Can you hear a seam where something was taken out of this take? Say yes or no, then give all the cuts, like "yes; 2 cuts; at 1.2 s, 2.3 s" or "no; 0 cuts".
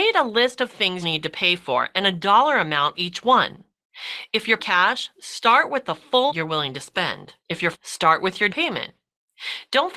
yes; 7 cuts; at 1.0 s, 2.9 s, 4.6 s, 6.3 s, 7.4 s, 7.7 s, 8.5 s